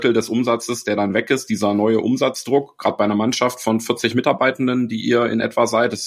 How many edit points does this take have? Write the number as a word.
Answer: zero